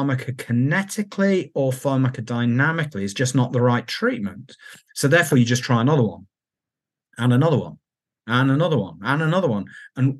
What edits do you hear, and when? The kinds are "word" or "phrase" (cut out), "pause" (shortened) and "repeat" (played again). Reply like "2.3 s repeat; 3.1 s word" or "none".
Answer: none